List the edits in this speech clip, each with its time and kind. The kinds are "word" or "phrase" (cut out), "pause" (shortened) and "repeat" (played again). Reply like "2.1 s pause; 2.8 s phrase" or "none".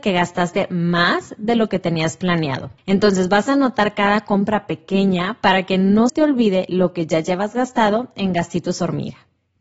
6.1 s word